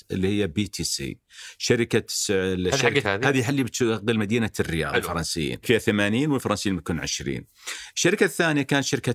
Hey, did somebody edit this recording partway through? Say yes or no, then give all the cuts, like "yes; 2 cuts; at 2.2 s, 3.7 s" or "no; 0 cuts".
yes; 3 cuts; at 3.0 s, 4.9 s, 5.6 s